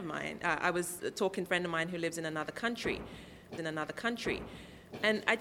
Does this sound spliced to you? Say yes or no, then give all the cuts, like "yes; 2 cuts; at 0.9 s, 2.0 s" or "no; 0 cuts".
yes; 2 cuts; at 1.5 s, 3.6 s